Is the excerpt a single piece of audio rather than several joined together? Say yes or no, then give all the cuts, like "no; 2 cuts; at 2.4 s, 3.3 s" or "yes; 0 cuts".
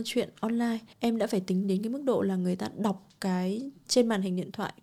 no; 1 cut; at 0.9 s